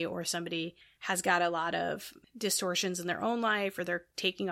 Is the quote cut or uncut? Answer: uncut